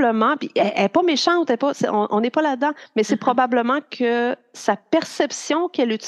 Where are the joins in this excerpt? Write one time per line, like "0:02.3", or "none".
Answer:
none